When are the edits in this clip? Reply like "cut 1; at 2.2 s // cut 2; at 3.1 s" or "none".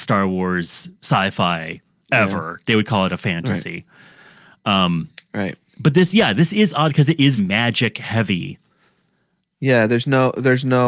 cut 1; at 7.4 s